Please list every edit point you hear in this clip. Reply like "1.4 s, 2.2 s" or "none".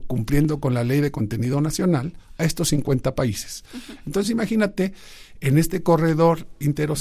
none